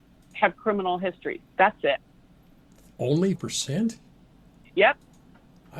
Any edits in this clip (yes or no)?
yes